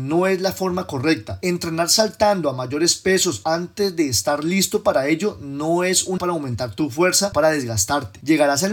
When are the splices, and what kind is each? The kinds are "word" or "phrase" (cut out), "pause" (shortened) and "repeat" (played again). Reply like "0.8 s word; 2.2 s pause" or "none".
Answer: 6.2 s word; 7.3 s word